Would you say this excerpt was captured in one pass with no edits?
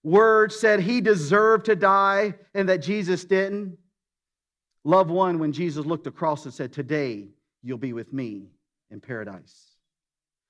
yes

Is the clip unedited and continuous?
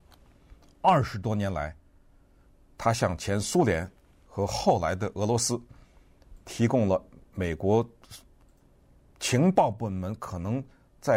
yes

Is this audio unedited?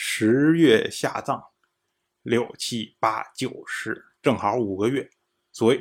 no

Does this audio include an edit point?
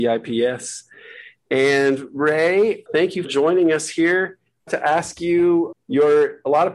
yes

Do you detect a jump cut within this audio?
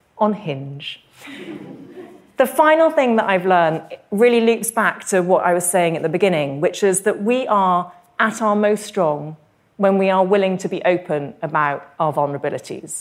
no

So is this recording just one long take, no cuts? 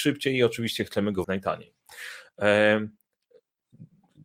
no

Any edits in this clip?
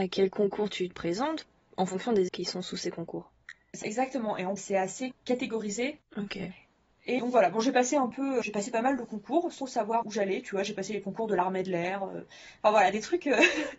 yes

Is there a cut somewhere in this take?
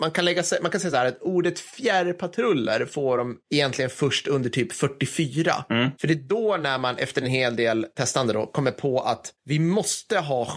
no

